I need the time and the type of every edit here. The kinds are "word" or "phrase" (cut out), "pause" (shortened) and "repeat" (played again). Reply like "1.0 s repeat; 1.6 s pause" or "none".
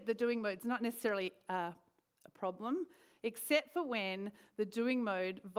none